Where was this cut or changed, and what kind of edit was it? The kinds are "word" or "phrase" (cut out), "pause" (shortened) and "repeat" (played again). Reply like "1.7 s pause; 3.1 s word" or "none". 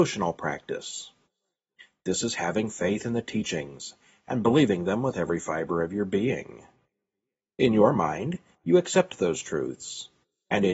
none